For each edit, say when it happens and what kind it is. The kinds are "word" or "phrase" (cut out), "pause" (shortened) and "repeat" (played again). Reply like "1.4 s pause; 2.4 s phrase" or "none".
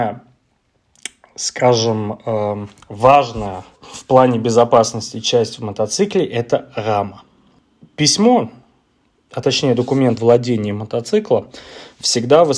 3.7 s pause; 10.2 s word